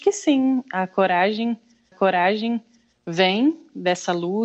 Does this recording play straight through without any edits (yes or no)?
no